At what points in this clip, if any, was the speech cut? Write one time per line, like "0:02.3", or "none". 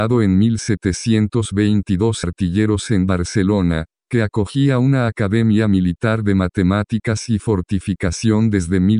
0:02.2

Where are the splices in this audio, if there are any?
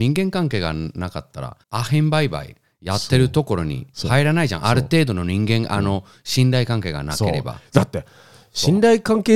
0:01.6

